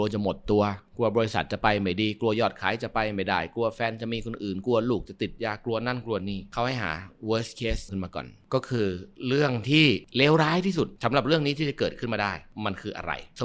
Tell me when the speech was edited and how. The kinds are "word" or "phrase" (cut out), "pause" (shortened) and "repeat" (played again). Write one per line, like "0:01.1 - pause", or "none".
0:07.9 - word